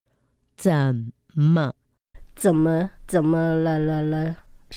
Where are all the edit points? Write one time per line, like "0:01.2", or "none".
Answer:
0:03.0